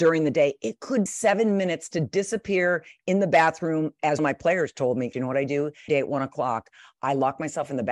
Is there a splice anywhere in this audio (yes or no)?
yes